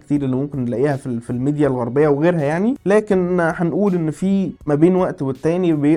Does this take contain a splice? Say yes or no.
no